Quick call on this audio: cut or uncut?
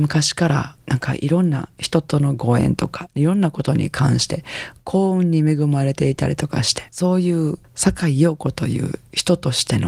cut